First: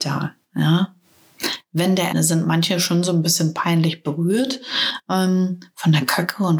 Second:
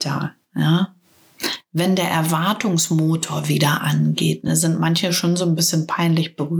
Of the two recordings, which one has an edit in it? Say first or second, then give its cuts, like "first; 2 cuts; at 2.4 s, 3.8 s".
first; 1 cut; at 2.1 s